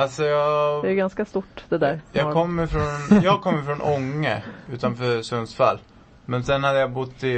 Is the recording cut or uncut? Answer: uncut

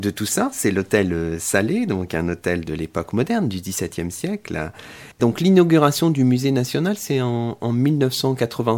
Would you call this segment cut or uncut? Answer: cut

